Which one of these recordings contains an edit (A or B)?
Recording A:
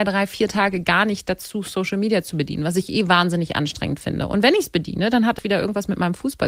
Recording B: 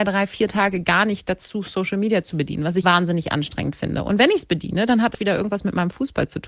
B